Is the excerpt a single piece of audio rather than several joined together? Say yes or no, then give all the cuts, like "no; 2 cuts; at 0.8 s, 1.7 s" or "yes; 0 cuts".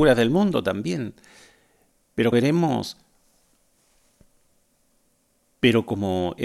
no; 1 cut; at 2.3 s